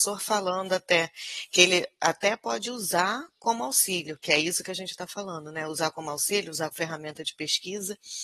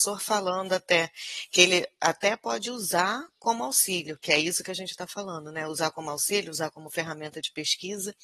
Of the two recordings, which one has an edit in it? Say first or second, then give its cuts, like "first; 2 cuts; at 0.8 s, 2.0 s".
first; 1 cut; at 6.7 s